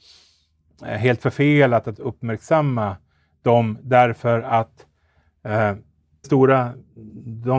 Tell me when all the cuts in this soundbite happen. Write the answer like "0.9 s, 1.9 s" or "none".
1.9 s, 6.2 s